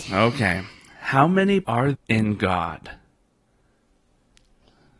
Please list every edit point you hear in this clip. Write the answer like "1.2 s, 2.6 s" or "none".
1.6 s, 1.9 s

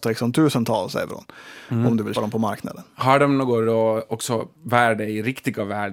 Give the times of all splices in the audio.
2.1 s, 4.5 s

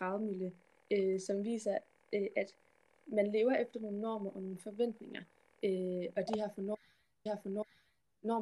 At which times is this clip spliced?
7.3 s

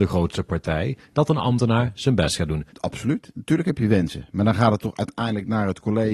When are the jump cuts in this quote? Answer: none

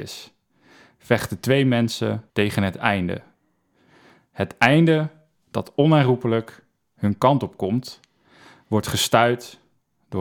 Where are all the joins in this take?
2.3 s

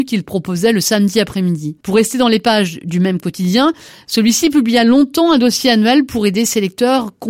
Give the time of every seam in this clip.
1.8 s

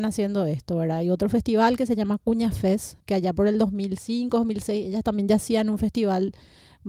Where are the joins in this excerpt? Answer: 3.0 s

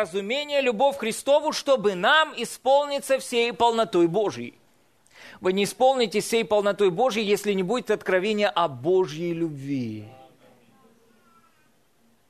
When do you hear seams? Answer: none

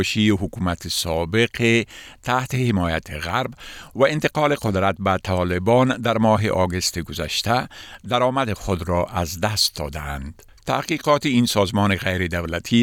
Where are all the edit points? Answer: none

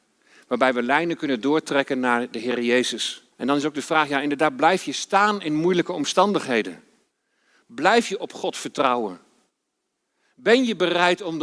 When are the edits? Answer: 3.3 s

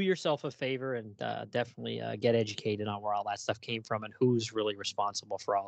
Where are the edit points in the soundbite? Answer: none

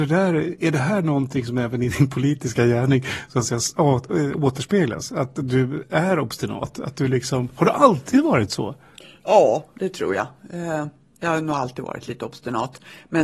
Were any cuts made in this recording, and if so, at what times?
none

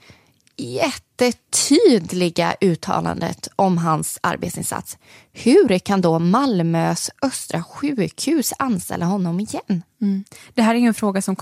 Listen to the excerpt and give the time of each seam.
none

